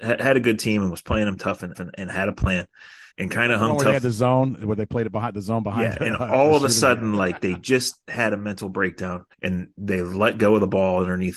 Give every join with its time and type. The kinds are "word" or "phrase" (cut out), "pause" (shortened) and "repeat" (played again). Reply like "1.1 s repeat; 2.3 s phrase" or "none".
1.7 s repeat; 3.1 s pause; 9.3 s pause